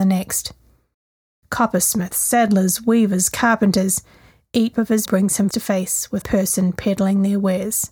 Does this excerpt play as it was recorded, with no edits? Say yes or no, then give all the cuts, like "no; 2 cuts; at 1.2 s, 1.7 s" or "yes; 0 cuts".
no; 5 cuts; at 2.1 s, 4.7 s, 5.1 s, 5.5 s, 6.2 s